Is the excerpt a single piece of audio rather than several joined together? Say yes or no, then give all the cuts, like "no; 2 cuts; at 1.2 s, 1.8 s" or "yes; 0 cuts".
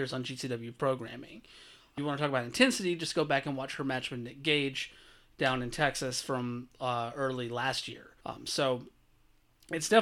no; 2 cuts; at 2.0 s, 8.2 s